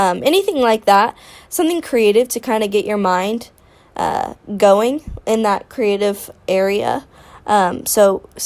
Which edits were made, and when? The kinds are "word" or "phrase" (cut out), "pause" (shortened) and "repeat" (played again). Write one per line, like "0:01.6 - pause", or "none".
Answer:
none